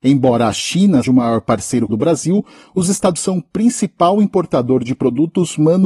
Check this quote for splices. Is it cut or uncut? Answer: cut